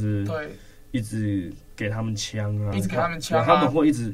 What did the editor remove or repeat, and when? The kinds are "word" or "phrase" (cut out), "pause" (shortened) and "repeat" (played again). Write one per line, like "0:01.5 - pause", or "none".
0:02.7 - word